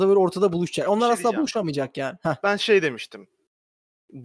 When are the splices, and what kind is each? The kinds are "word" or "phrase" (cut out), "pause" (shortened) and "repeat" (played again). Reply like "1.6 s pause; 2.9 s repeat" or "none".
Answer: 2.6 s word

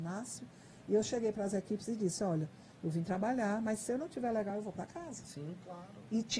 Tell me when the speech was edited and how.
none

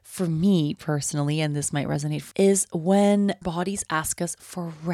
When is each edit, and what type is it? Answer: 2.3 s word; 3.4 s word

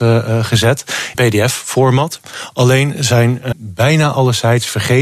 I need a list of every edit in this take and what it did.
1.1 s word; 3.5 s word

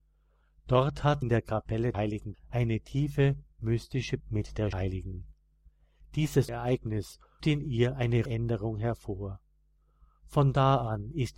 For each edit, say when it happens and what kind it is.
1.2 s word; 1.9 s word; 2.3 s word; 4.2 s word; 4.7 s word; 6.5 s word; 7.4 s word; 8.3 s word

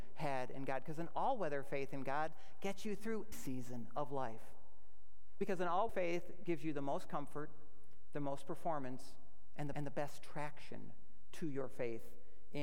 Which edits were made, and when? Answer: 3.3 s word; 5.9 s word; 9.7 s repeat

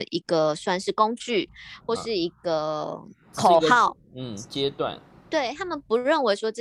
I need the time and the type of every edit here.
5.1 s pause

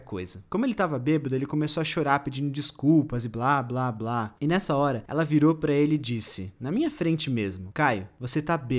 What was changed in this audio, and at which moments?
none

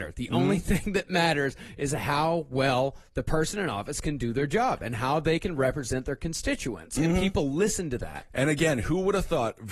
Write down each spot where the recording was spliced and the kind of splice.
none

